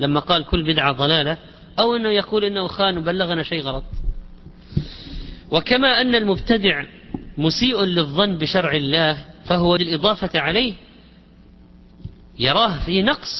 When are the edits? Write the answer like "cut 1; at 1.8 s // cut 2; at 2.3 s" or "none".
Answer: cut 1; at 9.8 s